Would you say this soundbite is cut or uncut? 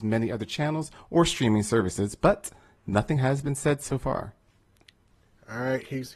uncut